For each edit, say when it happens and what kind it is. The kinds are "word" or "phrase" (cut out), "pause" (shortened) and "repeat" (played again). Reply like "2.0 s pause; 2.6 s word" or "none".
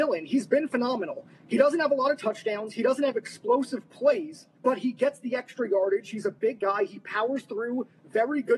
4.5 s pause